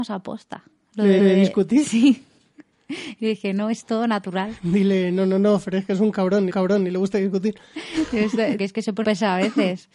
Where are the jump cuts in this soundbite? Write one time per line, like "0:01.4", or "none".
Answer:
0:01.2
0:06.5
0:08.6
0:09.0